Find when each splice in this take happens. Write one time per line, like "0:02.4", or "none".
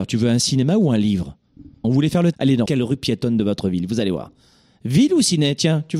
0:01.8
0:02.3
0:02.7